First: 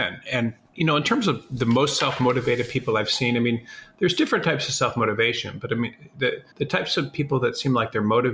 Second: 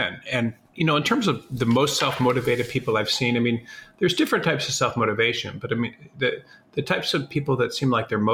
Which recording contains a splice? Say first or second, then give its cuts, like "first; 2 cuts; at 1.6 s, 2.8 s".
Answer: first; 1 cut; at 6.5 s